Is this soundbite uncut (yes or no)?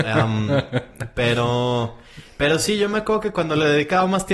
yes